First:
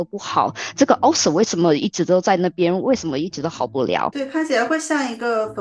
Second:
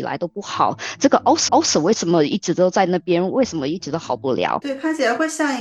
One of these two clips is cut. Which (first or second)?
second